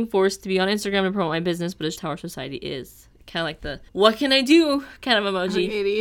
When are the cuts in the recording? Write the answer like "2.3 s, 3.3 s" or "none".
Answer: 2.0 s, 3.9 s